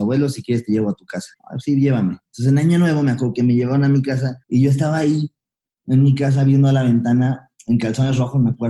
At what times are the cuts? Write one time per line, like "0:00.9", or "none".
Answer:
0:01.3
0:04.4

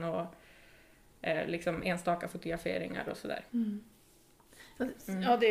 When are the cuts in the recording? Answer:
0:03.5

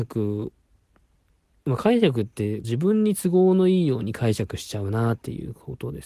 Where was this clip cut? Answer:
0:02.6

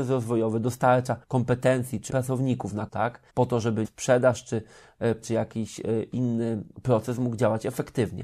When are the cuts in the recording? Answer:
0:01.2
0:02.1
0:02.9
0:03.3
0:03.8
0:05.2

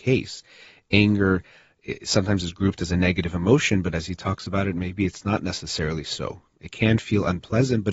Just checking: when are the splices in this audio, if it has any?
none

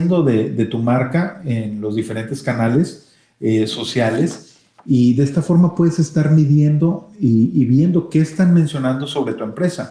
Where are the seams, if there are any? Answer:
none

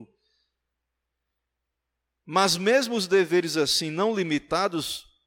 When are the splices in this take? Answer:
none

